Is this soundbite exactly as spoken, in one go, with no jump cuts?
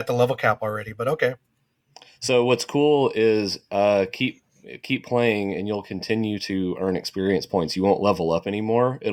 yes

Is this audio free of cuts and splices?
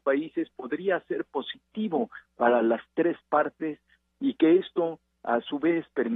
yes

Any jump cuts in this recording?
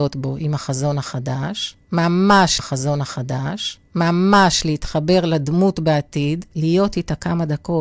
yes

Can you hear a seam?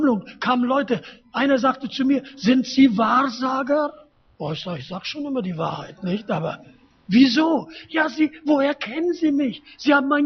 yes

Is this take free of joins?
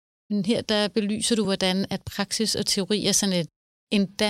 yes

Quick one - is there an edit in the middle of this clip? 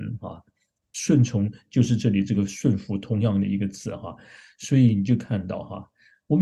no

